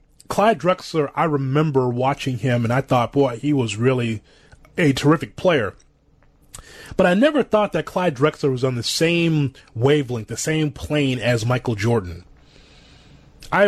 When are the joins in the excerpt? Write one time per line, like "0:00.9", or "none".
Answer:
none